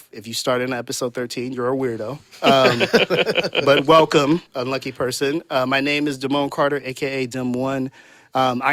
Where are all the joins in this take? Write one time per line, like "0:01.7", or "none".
0:04.5